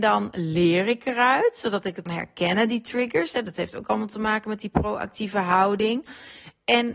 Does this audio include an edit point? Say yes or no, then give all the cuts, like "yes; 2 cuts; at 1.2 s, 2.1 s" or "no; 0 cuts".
yes; 1 cut; at 2.1 s